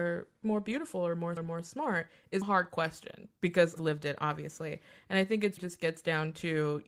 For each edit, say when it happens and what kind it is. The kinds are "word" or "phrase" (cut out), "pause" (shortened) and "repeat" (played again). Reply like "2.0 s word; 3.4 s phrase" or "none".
1.4 s word; 2.4 s word; 3.8 s word; 5.6 s word